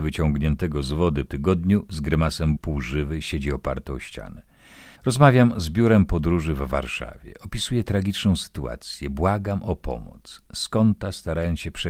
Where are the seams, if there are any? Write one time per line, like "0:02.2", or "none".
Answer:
0:01.3
0:02.6
0:05.0